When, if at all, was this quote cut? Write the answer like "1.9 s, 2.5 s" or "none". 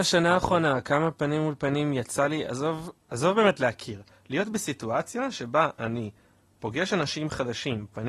none